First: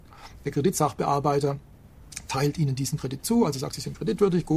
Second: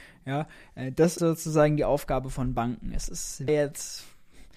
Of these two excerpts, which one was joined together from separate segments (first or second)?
second